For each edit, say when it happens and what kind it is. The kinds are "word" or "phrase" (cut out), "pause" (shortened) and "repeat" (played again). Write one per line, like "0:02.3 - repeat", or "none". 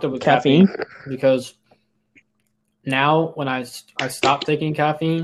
0:02.2 - pause